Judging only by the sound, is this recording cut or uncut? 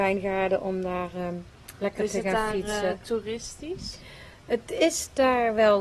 uncut